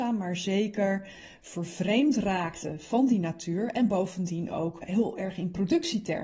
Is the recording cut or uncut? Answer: cut